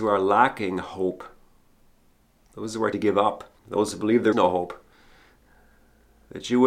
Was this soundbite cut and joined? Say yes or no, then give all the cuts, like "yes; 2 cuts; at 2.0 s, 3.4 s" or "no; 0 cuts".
yes; 3 cuts; at 2.9 s, 3.6 s, 4.3 s